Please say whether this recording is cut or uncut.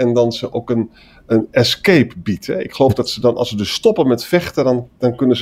uncut